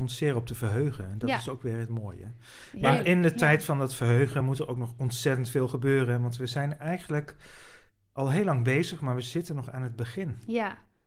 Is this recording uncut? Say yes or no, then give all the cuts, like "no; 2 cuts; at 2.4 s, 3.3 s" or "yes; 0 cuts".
yes; 0 cuts